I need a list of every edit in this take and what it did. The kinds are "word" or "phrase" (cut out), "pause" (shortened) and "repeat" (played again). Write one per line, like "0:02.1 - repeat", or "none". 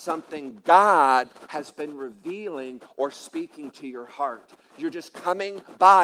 none

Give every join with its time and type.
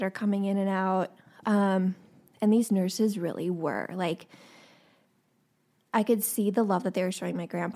none

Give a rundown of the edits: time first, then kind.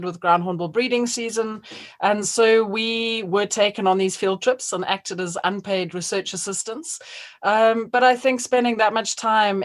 none

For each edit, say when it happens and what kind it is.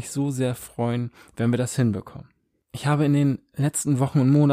none

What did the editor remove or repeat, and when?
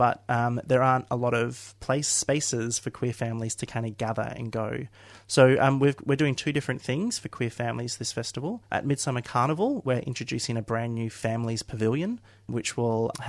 0:08.6 - pause

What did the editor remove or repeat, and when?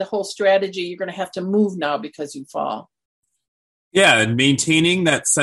none

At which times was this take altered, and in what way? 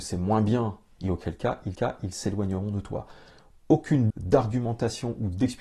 0:01.0 - word
0:01.7 - repeat
0:04.1 - word

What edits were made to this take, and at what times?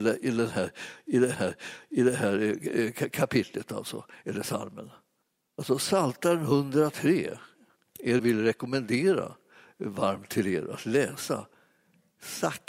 0:01.3 - repeat
0:05.2 - pause
0:08.2 - phrase

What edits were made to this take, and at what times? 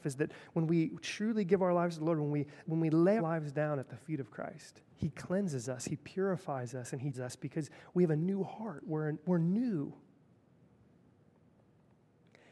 0:02.6 - word
0:03.2 - word
0:04.9 - pause
0:07.1 - word

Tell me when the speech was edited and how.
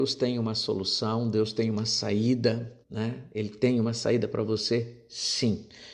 0:02.8 - pause

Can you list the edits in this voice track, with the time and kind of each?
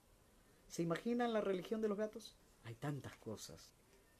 0:02.4 - pause

